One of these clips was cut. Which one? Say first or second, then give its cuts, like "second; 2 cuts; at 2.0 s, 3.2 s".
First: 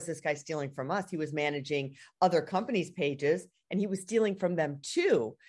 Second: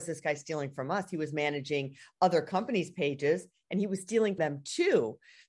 second; 1 cut; at 4.4 s